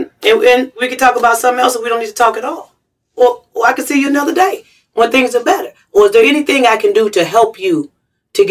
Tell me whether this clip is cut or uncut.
uncut